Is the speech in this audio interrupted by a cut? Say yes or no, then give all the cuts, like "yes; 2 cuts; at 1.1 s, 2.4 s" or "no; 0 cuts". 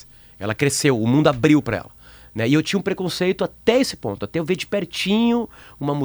no; 0 cuts